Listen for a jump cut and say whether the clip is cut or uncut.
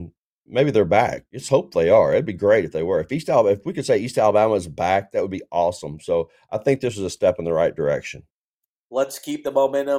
uncut